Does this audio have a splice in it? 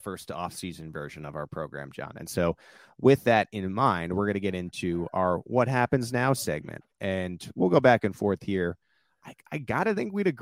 no; 0 cuts

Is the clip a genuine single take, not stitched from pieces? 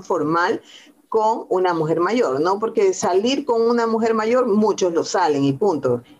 yes; 0 cuts

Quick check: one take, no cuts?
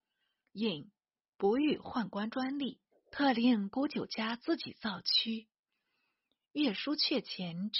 no; 1 cut; at 2.9 s

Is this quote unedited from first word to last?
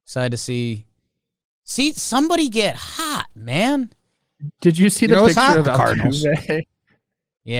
yes; 0 cuts

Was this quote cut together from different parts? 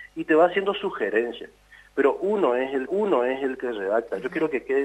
yes; 1 cut; at 2.9 s

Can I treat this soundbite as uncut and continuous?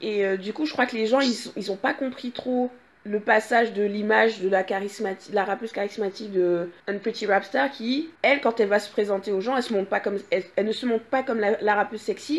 no; 3 cuts; at 2.9 s, 6.8 s, 8.1 s

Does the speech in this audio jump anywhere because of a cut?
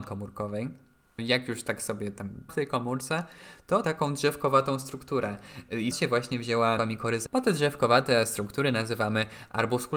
yes; 6 cuts; at 1.2 s, 2.5 s, 3.8 s, 5.9 s, 6.8 s, 7.3 s

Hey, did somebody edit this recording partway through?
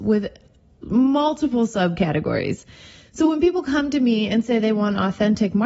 no; 0 cuts

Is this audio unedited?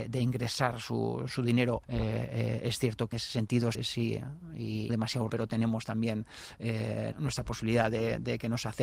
no; 7 cuts; at 1.3 s, 1.8 s, 3.1 s, 3.7 s, 4.9 s, 5.3 s, 7.1 s

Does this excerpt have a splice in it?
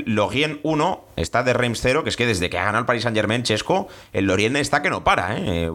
no; 0 cuts

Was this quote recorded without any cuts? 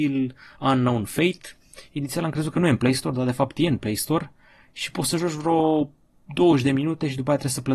yes; 0 cuts

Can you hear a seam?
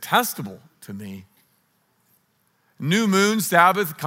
no; 0 cuts

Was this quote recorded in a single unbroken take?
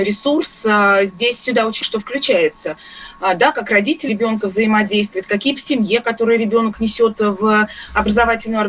no; 3 cuts; at 1.8 s, 4.1 s, 5.6 s

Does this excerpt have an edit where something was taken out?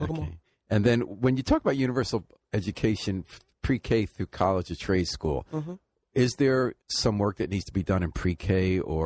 yes; 2 cuts; at 2.4 s, 6.8 s

